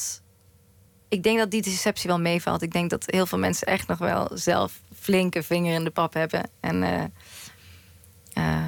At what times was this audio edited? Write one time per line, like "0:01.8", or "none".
none